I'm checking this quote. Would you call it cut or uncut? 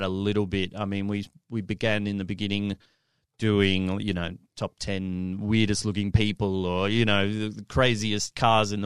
uncut